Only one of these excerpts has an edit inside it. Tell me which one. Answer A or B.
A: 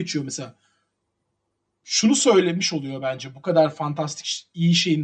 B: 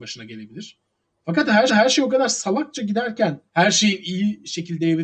B